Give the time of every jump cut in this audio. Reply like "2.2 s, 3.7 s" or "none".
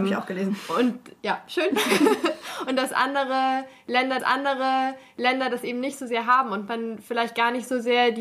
4.2 s